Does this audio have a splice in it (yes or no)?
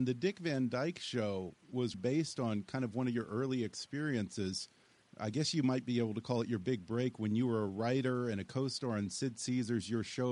yes